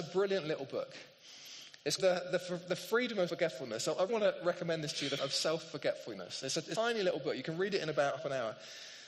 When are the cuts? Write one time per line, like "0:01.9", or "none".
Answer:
0:02.0
0:03.3
0:04.1
0:05.2
0:06.7
0:08.2